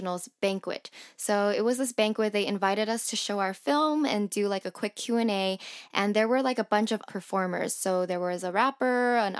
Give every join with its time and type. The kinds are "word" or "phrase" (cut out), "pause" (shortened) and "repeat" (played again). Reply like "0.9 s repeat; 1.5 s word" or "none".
7.1 s word